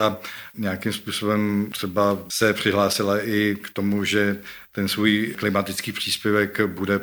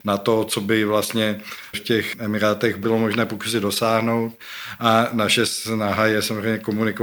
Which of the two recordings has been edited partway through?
second; 1 cut; at 1.7 s

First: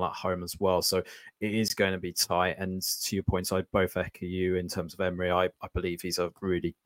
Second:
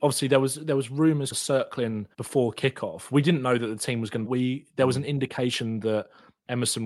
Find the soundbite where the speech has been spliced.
second; 3 cuts; at 1.3 s, 2.1 s, 4.2 s

